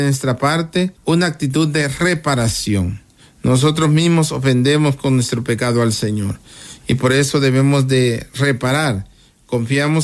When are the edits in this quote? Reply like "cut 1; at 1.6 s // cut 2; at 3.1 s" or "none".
cut 1; at 1.0 s